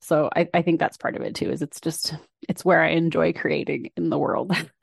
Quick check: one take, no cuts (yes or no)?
yes